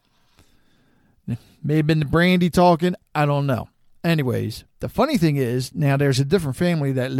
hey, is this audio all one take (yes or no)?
no